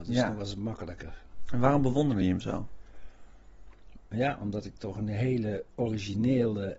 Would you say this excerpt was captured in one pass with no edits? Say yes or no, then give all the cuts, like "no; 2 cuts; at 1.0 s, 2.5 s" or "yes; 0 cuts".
yes; 0 cuts